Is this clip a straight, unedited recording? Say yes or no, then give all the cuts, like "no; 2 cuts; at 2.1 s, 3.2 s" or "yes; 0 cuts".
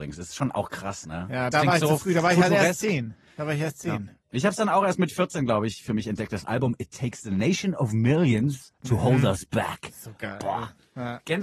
no; 1 cut; at 1.5 s